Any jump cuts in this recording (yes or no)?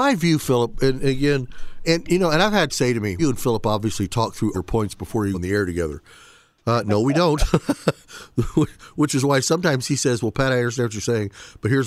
yes